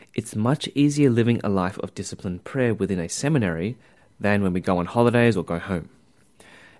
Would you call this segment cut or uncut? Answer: uncut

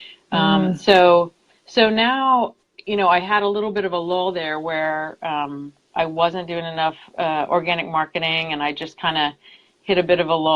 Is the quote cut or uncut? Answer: uncut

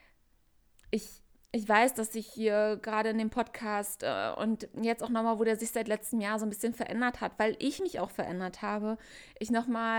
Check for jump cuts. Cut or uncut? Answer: uncut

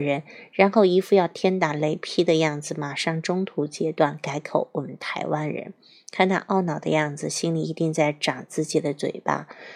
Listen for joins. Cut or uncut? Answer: uncut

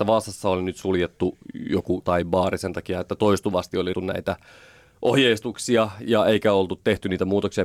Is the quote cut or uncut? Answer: cut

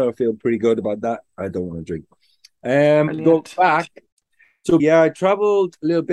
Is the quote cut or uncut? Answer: cut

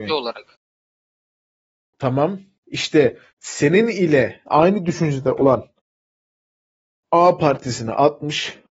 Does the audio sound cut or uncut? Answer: uncut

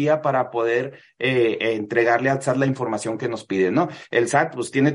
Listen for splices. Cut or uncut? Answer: uncut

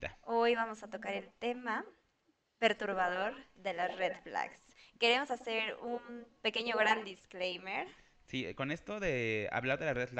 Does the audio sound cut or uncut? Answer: uncut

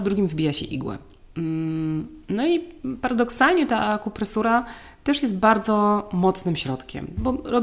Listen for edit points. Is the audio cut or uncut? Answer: uncut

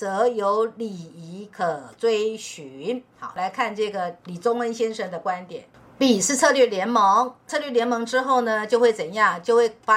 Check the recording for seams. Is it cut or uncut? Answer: uncut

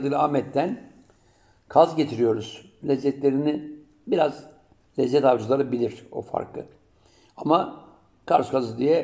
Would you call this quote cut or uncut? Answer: uncut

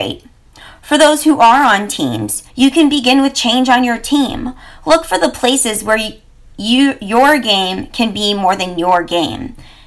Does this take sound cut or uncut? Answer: cut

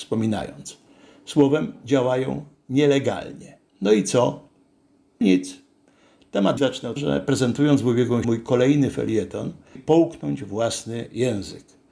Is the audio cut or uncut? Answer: cut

